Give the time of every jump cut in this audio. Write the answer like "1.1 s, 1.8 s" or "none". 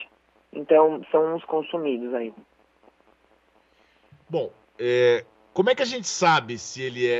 1.5 s